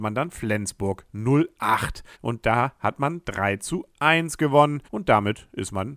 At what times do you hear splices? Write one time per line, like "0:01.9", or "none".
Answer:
0:02.1
0:04.8